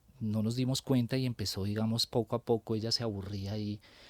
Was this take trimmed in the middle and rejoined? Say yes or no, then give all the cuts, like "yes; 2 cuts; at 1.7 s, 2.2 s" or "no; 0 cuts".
no; 0 cuts